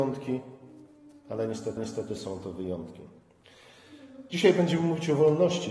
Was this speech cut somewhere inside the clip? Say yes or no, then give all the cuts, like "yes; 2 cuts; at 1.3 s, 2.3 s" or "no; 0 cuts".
yes; 1 cut; at 1.8 s